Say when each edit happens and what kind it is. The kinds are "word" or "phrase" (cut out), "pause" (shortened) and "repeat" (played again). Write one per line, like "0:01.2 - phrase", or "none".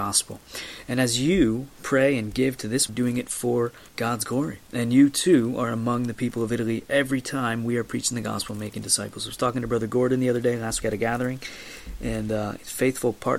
0:02.9 - phrase
0:03.9 - pause
0:10.8 - word